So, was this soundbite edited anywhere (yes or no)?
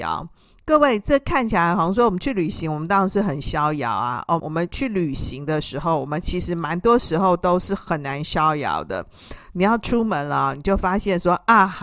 yes